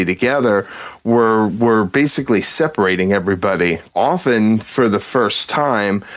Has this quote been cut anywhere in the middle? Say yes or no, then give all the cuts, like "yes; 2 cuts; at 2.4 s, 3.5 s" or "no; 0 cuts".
no; 0 cuts